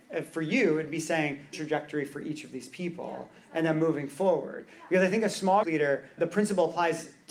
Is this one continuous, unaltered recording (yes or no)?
no